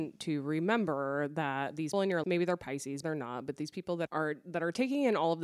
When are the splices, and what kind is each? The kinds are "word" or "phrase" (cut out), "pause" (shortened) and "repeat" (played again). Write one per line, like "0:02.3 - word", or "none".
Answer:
0:01.9 - word
0:02.2 - word
0:03.0 - word
0:04.1 - word